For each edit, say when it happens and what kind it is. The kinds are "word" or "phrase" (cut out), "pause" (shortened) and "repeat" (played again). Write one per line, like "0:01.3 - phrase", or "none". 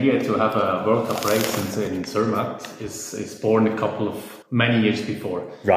0:04.4 - pause